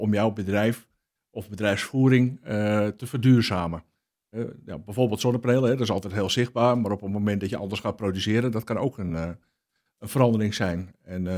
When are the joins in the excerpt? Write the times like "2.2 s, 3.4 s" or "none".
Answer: none